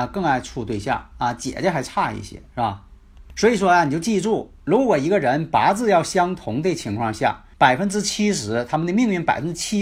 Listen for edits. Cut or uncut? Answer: cut